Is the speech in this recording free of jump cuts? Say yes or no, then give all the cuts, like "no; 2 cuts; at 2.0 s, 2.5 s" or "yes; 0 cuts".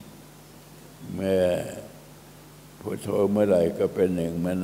yes; 0 cuts